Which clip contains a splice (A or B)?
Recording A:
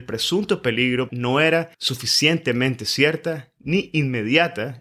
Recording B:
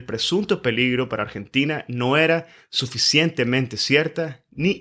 A